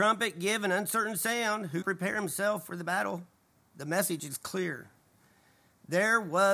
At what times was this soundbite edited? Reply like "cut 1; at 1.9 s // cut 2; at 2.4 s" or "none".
cut 1; at 1.8 s